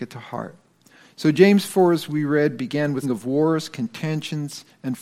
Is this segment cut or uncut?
cut